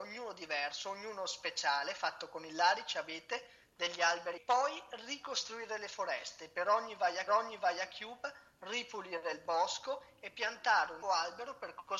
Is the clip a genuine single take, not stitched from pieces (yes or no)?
no